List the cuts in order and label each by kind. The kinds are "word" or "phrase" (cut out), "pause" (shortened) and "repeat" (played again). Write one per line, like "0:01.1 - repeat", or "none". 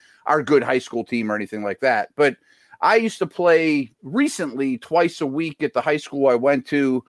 none